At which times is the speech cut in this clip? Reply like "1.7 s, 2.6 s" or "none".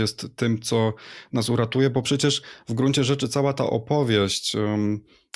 none

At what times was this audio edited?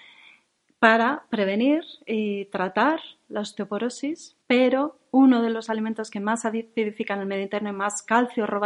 4.4 s

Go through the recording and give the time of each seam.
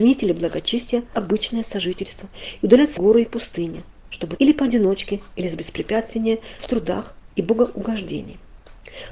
1.1 s, 3.0 s, 4.4 s, 5.6 s, 6.6 s, 7.3 s

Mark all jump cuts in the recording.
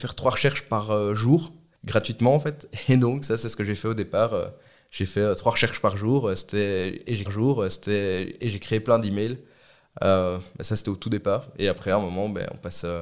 7.3 s

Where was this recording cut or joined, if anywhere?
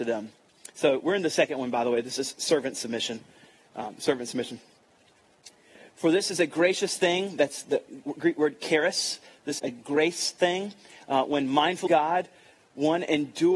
9.6 s, 11.9 s

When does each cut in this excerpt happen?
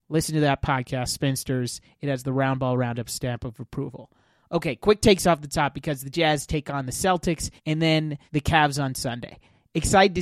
7.6 s, 8.3 s

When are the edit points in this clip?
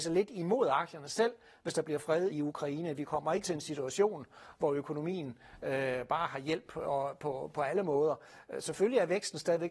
2.3 s, 3.4 s

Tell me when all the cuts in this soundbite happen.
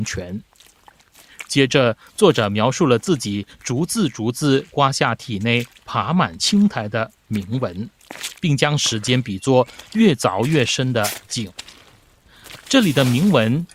8.4 s

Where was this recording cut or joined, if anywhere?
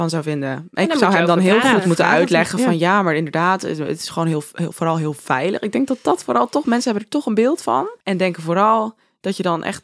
8.0 s

